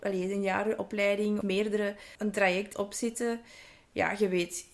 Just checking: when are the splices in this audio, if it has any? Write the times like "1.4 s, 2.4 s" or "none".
1.4 s, 2.1 s, 2.7 s